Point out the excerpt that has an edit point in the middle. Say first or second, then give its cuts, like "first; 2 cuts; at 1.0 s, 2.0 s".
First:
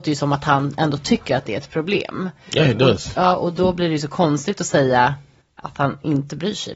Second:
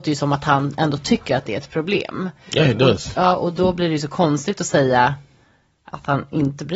first; 1 cut; at 5.4 s